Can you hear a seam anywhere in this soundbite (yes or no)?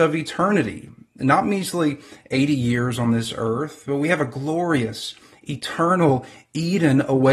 no